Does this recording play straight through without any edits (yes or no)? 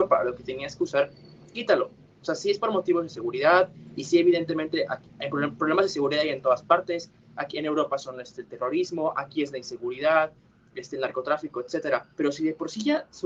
no